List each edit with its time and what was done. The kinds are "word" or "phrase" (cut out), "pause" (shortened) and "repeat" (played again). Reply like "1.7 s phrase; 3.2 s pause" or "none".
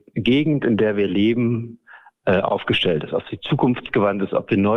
none